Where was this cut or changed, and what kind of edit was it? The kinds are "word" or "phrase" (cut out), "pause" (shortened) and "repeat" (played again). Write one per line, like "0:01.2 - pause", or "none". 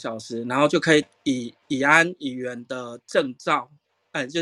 0:01.6 - pause